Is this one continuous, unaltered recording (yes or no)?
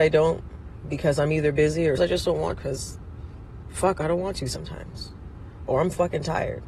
no